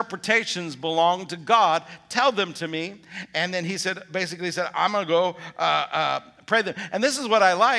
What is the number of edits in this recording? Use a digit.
0